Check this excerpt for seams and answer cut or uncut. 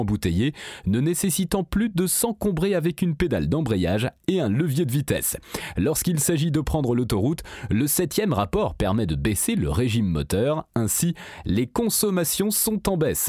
uncut